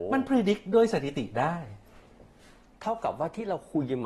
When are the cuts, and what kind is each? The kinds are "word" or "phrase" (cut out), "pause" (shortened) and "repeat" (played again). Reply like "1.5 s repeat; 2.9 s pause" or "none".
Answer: none